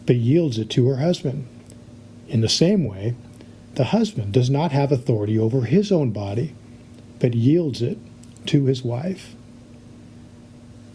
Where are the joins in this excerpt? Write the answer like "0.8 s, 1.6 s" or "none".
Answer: none